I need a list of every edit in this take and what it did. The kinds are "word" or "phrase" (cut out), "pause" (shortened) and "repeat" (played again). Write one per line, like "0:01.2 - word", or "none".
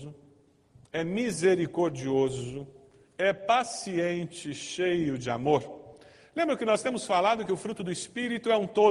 none